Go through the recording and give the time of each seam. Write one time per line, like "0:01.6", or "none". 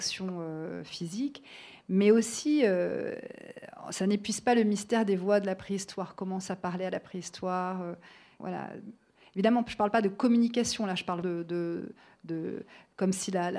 0:08.4
0:11.2